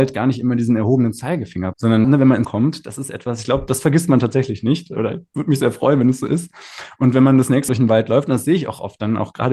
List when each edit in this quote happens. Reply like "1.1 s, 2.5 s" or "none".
1.7 s, 2.0 s, 2.4 s, 7.7 s